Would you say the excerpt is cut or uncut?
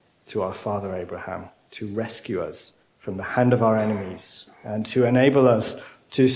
cut